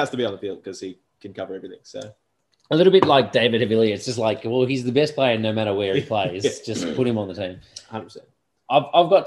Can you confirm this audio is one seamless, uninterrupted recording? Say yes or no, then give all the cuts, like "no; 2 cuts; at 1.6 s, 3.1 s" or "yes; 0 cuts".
yes; 0 cuts